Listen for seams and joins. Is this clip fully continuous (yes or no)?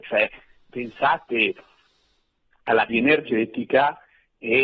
no